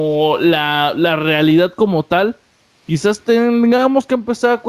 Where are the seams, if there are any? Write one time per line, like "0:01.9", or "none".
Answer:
none